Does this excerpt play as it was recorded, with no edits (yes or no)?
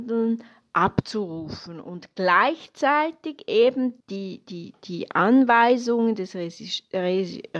no